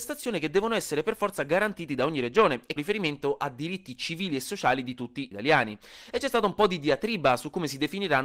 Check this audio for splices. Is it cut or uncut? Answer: cut